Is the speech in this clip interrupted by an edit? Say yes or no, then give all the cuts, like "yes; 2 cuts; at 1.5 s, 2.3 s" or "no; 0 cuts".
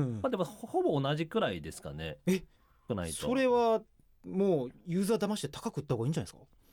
no; 0 cuts